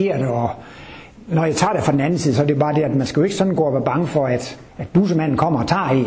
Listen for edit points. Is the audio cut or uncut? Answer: cut